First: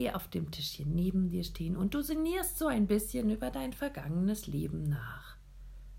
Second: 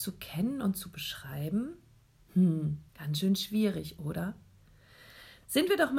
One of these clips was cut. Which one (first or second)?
second